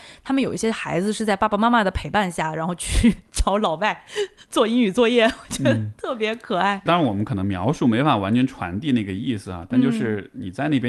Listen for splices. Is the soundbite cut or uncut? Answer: cut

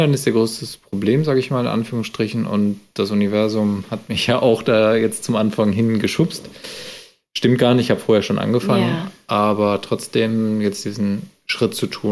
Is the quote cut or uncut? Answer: uncut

